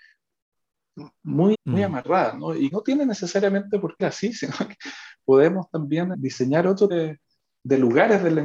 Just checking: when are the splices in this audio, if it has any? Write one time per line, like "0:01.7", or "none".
0:01.5
0:02.7
0:04.0
0:06.1
0:06.9